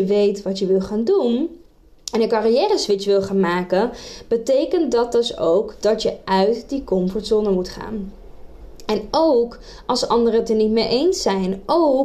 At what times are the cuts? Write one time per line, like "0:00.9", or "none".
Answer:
none